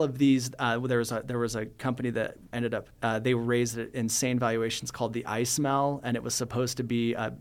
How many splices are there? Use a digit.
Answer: 2